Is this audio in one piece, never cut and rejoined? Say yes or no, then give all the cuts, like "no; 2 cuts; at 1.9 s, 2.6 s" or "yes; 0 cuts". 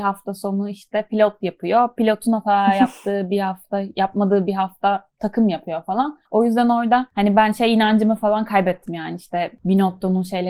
no; 2 cuts; at 5.1 s, 6.2 s